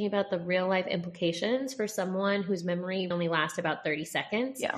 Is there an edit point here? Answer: yes; 1 cut; at 3.1 s

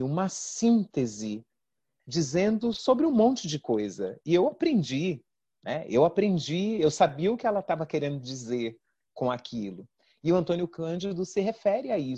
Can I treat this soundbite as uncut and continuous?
yes; 0 cuts

